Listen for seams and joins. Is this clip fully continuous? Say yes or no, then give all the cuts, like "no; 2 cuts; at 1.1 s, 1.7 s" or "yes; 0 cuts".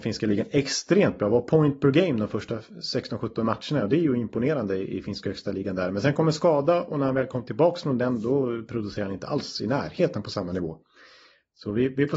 yes; 0 cuts